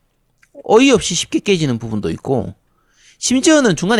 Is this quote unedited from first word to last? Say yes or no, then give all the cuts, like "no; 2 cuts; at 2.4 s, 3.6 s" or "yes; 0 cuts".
yes; 0 cuts